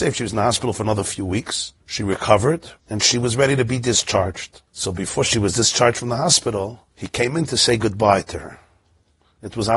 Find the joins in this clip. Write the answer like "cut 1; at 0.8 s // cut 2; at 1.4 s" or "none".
cut 1; at 1.8 s // cut 2; at 2.8 s // cut 3; at 4.7 s // cut 4; at 6.9 s

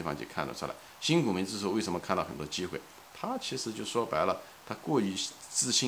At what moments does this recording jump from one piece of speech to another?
cut 1; at 3.1 s

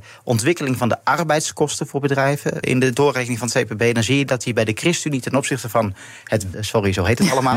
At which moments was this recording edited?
cut 1; at 2.6 s // cut 2; at 6.5 s

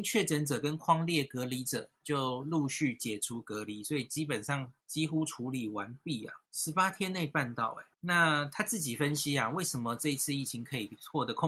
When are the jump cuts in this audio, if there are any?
cut 1; at 4.8 s // cut 2; at 6.5 s // cut 3; at 7.9 s

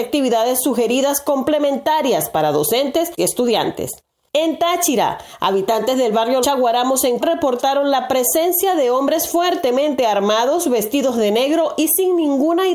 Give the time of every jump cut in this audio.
cut 1; at 3.2 s // cut 2; at 6.4 s // cut 3; at 7.2 s

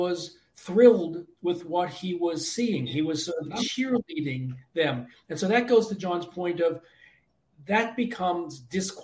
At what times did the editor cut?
none

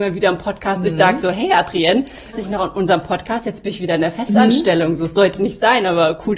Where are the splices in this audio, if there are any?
cut 1; at 2.3 s

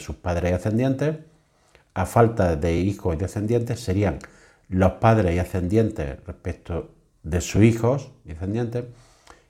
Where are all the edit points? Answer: none

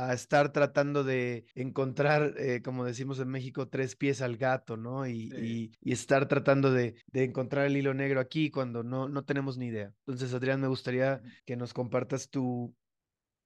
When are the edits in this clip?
cut 1; at 1.5 s // cut 2; at 5.7 s // cut 3; at 7.0 s // cut 4; at 10.0 s // cut 5; at 11.4 s

